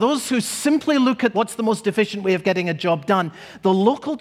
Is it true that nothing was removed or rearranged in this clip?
no; 1 cut; at 1.3 s

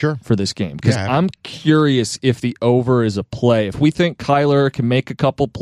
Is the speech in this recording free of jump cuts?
yes; 0 cuts

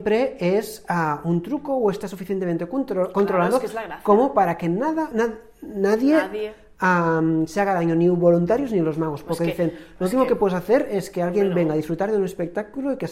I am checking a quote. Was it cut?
yes; 1 cut; at 5.1 s

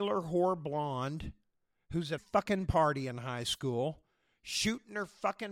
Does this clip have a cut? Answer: yes; 1 cut; at 2.2 s

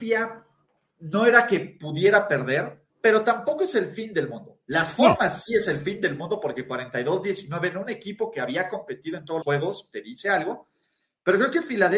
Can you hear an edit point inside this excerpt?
yes; 2 cuts; at 2.9 s, 9.4 s

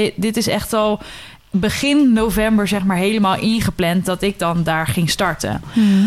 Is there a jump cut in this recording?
no; 0 cuts

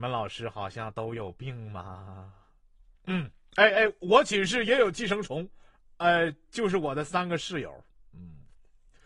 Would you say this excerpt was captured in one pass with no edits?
yes; 0 cuts

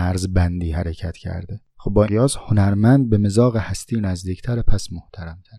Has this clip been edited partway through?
yes; 2 cuts; at 1.7 s, 2.1 s

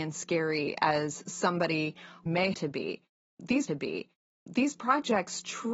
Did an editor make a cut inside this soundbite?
yes; 2 cuts; at 2.5 s, 3.7 s

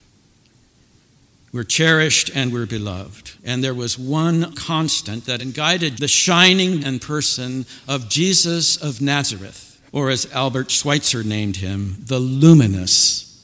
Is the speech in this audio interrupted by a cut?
yes; 6 cuts; at 3.4 s, 4.5 s, 5.4 s, 6.0 s, 6.8 s, 9.9 s

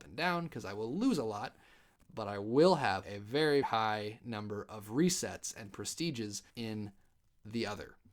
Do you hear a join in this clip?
yes; 3 cuts; at 3.0 s, 3.6 s, 6.5 s

